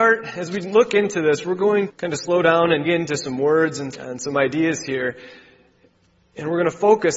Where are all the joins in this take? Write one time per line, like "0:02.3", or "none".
0:01.9
0:02.8
0:03.9